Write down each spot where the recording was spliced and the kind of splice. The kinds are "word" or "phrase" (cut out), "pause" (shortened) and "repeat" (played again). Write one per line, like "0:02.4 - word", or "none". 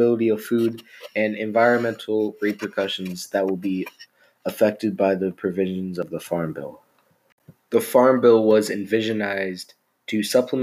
none